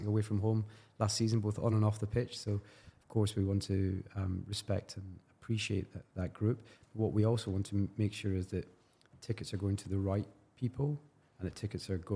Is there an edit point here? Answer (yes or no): no